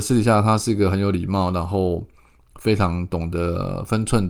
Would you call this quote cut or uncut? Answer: uncut